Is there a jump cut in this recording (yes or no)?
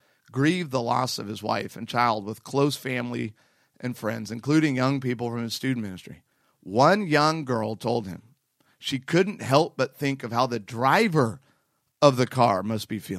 no